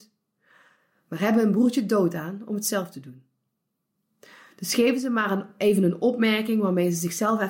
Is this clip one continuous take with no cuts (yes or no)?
yes